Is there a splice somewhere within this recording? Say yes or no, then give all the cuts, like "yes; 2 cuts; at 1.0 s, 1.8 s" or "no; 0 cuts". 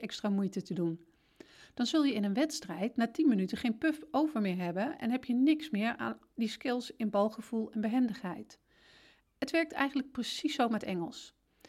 no; 0 cuts